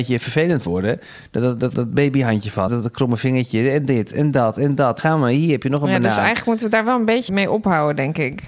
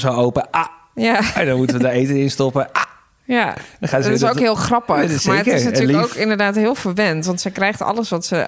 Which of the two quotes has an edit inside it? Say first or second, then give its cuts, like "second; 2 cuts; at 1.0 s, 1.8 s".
first; 4 cuts; at 1.7 s, 2.7 s, 5.0 s, 7.3 s